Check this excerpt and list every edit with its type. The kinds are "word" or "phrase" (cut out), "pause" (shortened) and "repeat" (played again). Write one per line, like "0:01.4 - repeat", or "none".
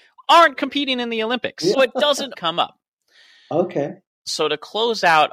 0:01.7 - word
0:02.3 - word